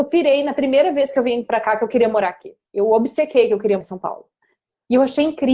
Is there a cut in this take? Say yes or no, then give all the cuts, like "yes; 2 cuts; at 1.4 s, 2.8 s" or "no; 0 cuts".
yes; 2 cuts; at 2.6 s, 3.8 s